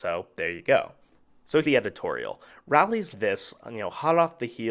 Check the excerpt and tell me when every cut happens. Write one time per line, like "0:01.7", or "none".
0:01.6
0:03.1

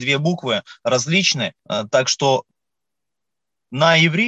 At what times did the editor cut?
0:01.6

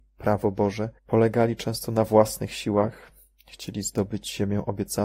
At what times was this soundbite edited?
0:01.0

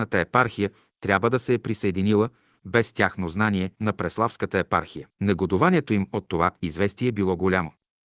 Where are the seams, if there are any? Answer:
0:03.7
0:05.1

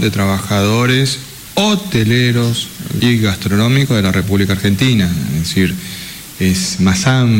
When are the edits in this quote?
0:03.0

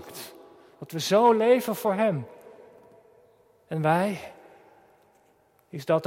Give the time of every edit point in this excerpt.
none

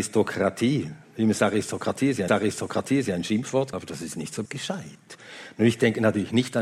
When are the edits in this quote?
0:02.3
0:03.7
0:04.4

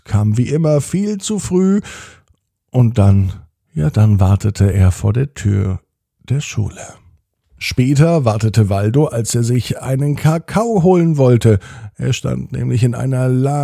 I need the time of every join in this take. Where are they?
none

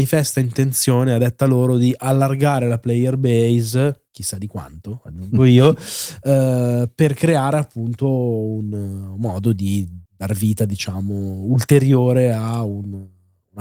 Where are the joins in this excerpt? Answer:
0:04.1
0:10.1

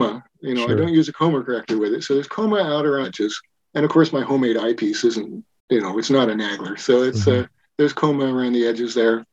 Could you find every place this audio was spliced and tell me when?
0:03.0

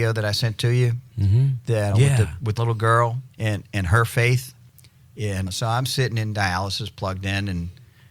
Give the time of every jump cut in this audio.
0:01.9
0:02.6
0:03.3
0:05.5

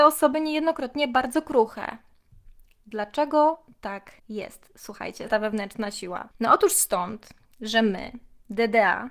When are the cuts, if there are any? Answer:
0:04.2
0:05.3
0:06.3

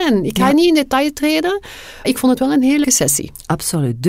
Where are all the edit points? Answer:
0:02.0
0:02.8

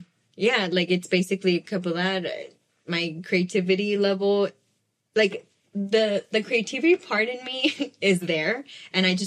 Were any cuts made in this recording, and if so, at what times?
none

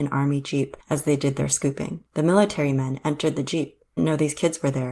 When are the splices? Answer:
0:02.1
0:04.0

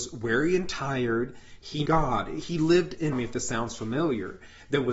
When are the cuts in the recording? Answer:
0:01.9
0:03.1

